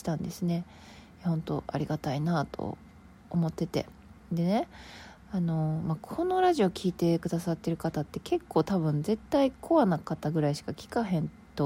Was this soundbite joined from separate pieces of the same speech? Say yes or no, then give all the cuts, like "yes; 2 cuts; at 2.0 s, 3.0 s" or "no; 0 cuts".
no; 0 cuts